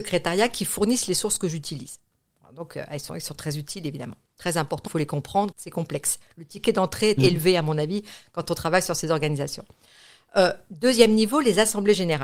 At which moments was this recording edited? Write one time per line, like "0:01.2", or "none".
0:04.9
0:05.5
0:07.2